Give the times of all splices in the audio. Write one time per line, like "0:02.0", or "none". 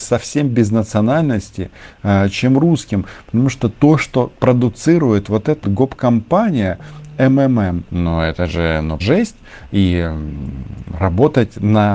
0:05.6
0:07.9
0:09.0